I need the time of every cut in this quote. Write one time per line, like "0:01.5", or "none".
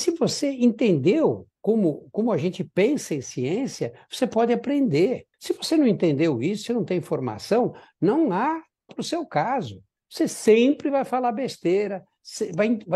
0:01.5
0:05.3
0:06.7
0:08.9